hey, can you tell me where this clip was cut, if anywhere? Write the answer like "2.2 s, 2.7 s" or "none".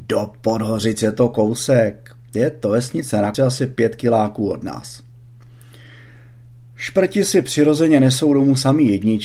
3.3 s